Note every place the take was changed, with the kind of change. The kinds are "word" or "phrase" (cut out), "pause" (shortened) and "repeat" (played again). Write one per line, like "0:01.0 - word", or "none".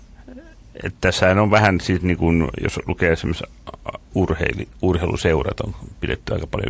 0:04.1 - phrase